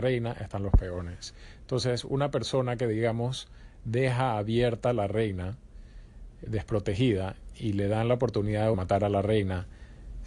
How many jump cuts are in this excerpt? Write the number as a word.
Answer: two